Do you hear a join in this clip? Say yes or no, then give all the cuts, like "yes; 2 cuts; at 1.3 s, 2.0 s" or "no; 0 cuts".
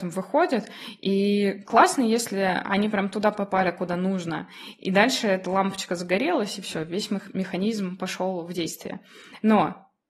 no; 0 cuts